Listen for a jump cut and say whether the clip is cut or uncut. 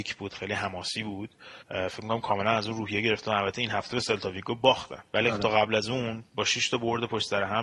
cut